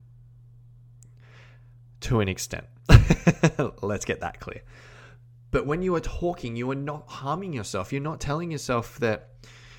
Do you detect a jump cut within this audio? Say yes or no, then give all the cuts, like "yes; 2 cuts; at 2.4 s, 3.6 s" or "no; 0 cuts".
no; 0 cuts